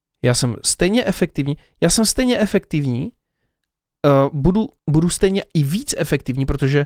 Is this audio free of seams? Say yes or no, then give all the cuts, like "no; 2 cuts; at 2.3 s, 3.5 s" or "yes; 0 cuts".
no; 1 cut; at 4.8 s